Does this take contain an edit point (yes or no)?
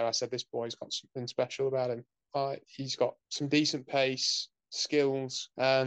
no